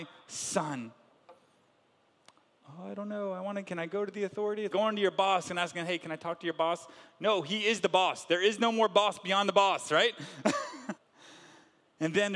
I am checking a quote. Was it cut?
yes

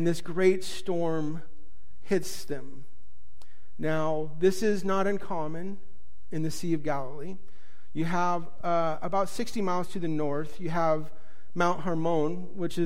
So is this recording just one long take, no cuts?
yes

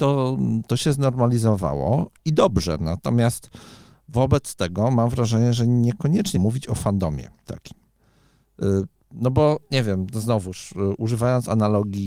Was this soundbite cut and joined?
yes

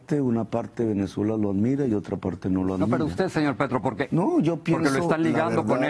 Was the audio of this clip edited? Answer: no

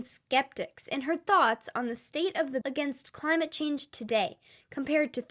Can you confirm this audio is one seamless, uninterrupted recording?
no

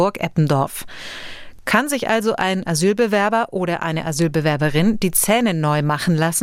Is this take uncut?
yes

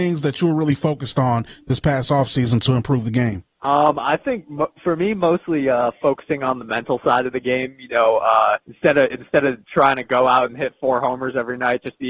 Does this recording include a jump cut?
yes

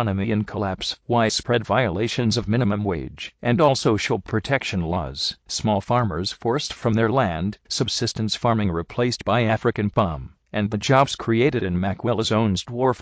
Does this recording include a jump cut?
no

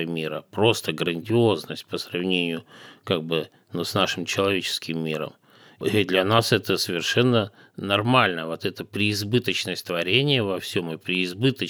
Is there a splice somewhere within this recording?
no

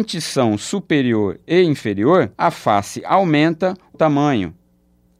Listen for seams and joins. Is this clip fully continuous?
no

